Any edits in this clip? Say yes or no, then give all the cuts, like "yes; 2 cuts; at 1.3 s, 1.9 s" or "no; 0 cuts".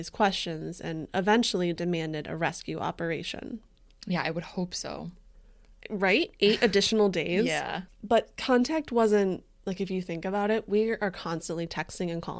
no; 0 cuts